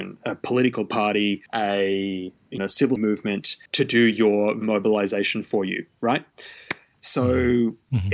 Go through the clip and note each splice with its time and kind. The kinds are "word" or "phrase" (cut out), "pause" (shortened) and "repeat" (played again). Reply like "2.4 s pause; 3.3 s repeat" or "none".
1.5 s pause; 2.6 s phrase; 3.0 s word; 3.7 s pause; 4.6 s word